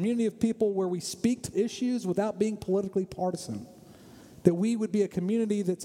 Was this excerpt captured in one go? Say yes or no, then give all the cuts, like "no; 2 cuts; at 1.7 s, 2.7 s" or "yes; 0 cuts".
no; 1 cut; at 1.5 s